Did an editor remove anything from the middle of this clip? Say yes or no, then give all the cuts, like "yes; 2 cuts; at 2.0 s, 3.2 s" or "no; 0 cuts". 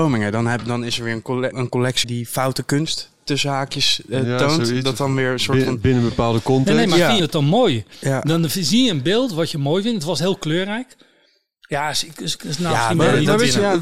yes; 3 cuts; at 1.5 s, 2.0 s, 7.2 s